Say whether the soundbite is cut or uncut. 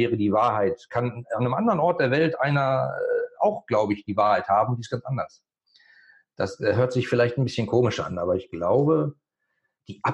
uncut